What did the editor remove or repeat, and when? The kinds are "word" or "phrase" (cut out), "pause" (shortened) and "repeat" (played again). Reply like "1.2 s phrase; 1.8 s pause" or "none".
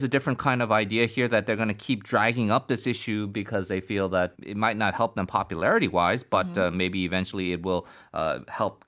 4.3 s word